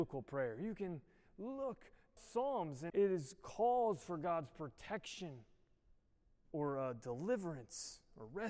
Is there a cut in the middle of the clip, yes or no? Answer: yes